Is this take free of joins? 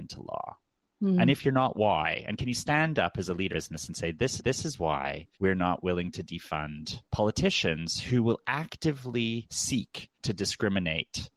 no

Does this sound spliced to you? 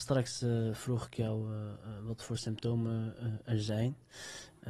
no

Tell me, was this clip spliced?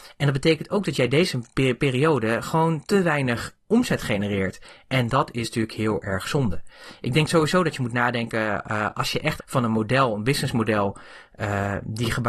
yes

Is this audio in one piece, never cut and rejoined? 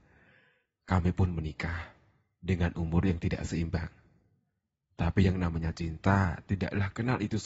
yes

